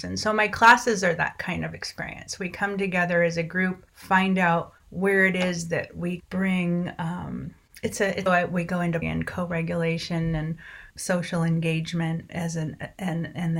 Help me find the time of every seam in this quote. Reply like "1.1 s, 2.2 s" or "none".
3.9 s, 4.8 s, 6.2 s, 8.3 s, 9.0 s, 10.9 s